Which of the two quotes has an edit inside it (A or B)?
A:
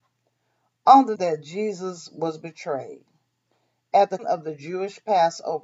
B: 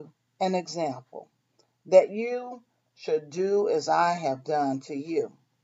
A